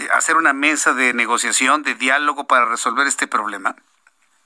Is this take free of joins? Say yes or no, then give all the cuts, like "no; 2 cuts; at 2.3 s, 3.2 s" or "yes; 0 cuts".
yes; 0 cuts